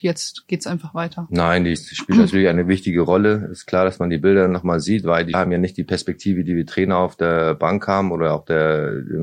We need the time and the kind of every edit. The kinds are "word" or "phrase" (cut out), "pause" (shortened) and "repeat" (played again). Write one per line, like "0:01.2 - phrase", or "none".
0:01.8 - word
0:05.3 - word